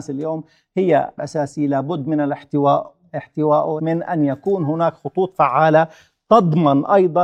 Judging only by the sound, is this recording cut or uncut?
cut